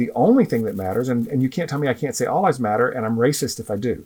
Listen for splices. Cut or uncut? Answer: uncut